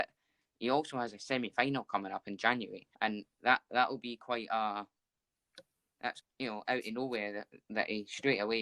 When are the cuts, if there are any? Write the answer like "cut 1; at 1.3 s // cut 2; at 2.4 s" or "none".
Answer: cut 1; at 2.9 s // cut 2; at 6.2 s